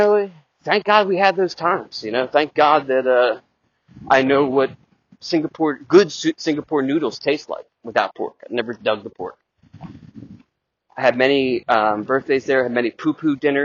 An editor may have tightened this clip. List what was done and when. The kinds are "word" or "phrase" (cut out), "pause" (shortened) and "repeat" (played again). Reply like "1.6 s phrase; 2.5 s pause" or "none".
none